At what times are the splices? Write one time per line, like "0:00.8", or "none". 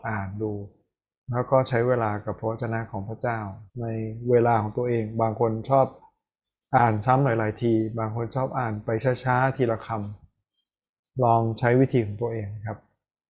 0:03.7